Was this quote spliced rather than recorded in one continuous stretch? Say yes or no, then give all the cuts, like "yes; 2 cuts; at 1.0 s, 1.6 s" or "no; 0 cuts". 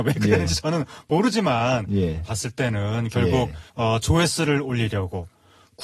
yes; 2 cuts; at 2.2 s, 3.7 s